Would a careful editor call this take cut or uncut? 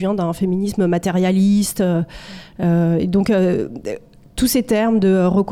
uncut